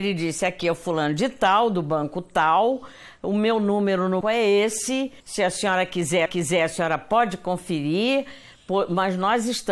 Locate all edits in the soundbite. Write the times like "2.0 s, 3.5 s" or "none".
4.2 s, 5.2 s, 6.3 s

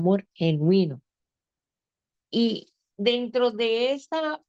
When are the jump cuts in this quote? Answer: none

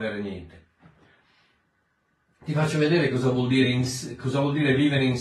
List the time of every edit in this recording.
none

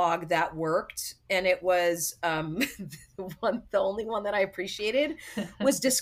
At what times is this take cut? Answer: none

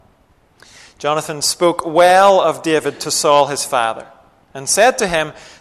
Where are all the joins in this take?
none

